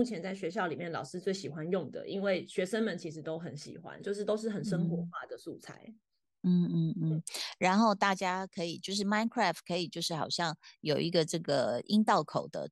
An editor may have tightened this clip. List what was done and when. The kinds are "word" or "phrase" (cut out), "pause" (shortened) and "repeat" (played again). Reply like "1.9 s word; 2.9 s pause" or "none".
none